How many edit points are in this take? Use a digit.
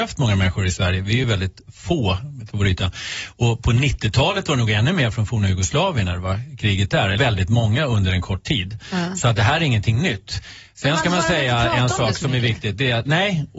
2